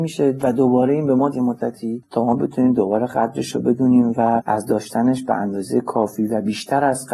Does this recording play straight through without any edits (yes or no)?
no